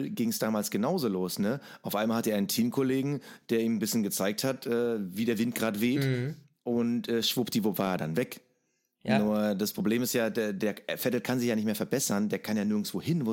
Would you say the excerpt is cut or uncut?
uncut